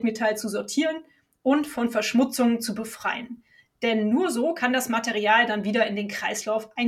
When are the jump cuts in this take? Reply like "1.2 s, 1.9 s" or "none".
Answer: none